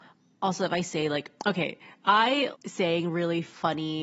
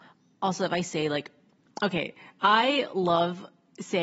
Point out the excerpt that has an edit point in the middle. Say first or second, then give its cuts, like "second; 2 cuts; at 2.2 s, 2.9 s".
first; 2 cuts; at 1.4 s, 2.5 s